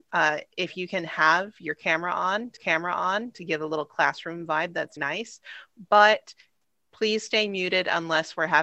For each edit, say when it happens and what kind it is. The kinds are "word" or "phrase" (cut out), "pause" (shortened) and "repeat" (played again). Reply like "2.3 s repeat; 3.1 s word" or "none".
2.6 s repeat; 5.0 s word